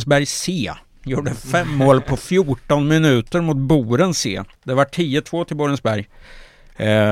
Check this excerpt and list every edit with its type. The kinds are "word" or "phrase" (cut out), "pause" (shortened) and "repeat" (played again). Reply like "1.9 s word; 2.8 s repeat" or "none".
4.5 s pause